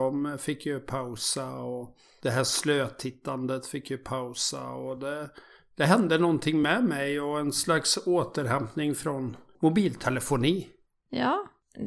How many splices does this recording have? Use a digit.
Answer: 0